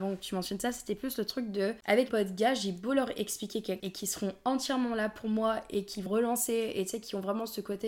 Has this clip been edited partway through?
yes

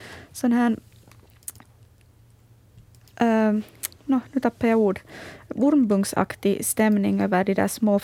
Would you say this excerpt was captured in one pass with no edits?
yes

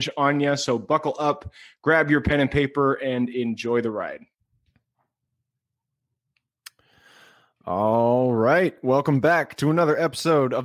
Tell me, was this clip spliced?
no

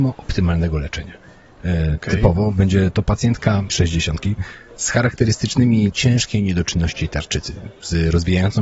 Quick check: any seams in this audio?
yes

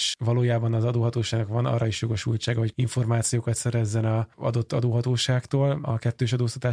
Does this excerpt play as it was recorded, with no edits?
no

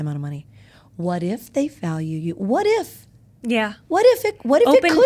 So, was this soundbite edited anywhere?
no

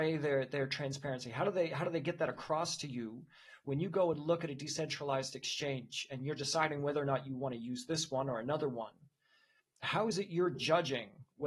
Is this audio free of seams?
yes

